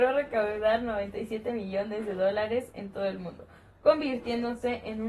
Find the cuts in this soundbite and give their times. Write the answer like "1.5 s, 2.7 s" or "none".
none